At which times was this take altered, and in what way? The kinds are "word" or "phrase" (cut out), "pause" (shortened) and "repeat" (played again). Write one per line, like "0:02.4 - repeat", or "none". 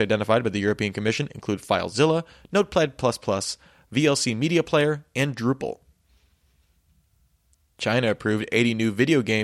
none